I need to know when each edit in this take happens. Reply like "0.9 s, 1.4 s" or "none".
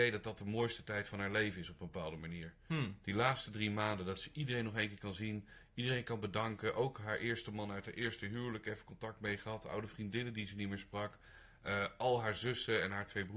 none